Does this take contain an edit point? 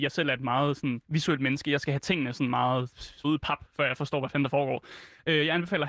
yes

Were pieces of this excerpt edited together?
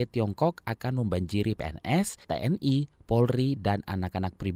yes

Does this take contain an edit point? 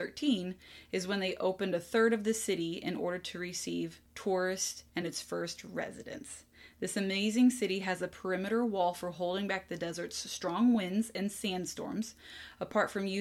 no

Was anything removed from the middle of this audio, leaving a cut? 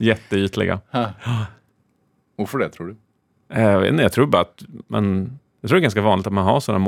no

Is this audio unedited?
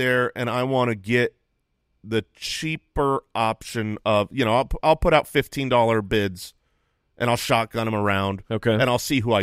yes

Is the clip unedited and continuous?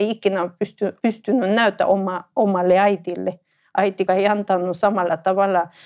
no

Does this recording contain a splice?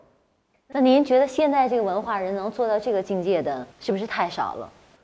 yes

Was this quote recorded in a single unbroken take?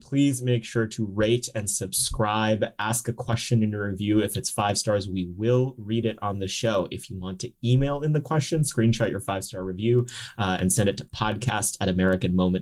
yes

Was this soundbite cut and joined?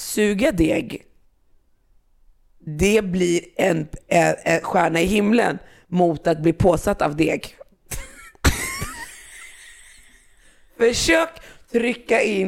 no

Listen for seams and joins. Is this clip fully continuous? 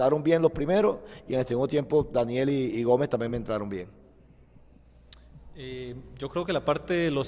yes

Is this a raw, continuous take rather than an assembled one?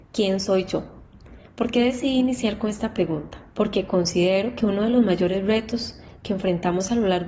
no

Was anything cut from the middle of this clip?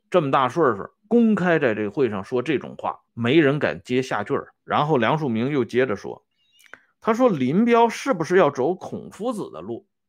yes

